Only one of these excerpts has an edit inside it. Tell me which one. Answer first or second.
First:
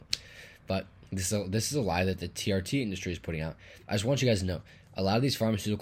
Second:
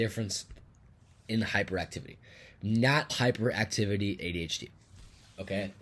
second